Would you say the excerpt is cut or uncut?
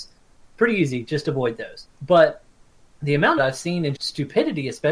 cut